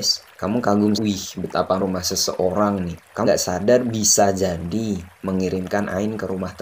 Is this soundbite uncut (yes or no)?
no